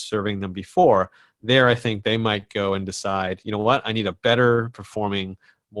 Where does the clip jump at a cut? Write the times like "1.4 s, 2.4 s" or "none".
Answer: none

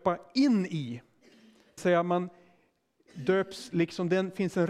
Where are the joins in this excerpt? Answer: 1.8 s

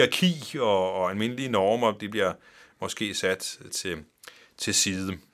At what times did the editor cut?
3.7 s

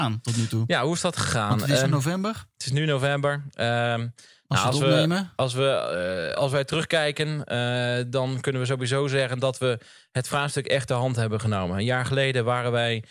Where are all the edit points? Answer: 1.8 s, 6.3 s

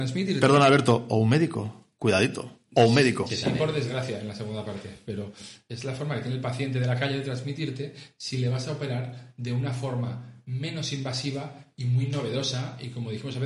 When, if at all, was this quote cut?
none

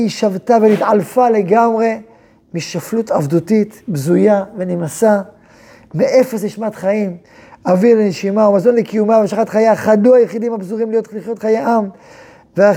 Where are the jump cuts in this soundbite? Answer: none

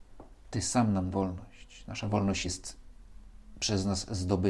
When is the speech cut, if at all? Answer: 1.1 s, 2.4 s

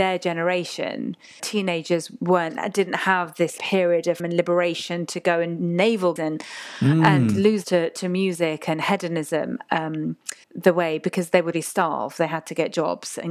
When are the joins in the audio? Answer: 1.4 s, 3.6 s, 4.2 s, 6.2 s, 7.6 s, 10.4 s, 11.5 s

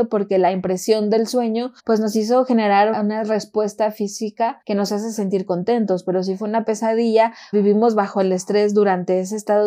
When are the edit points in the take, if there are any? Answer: 1.8 s, 2.9 s, 4.6 s, 7.5 s

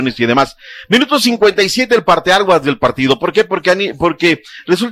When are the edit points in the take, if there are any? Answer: none

